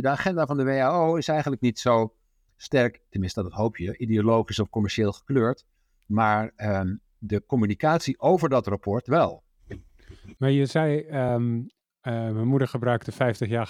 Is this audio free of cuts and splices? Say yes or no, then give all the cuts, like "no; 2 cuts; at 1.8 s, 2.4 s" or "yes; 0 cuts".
yes; 0 cuts